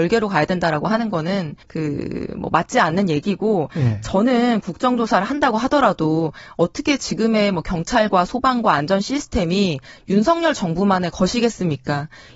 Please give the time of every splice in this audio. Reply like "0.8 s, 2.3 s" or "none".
1.6 s

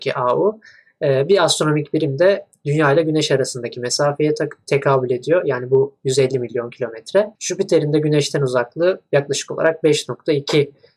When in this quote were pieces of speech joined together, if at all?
7.3 s

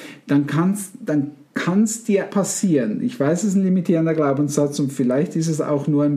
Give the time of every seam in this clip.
2.3 s

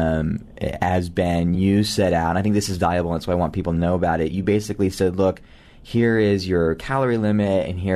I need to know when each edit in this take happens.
none

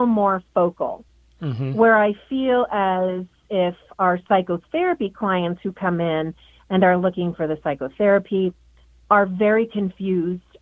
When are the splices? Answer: none

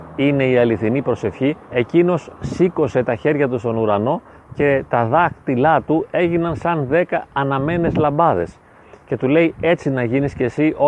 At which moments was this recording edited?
1.6 s

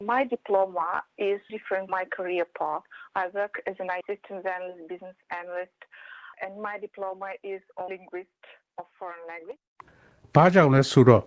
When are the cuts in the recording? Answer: 1.5 s, 1.9 s, 4.0 s, 7.9 s

